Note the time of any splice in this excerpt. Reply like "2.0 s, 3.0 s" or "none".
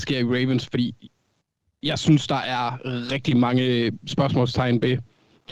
none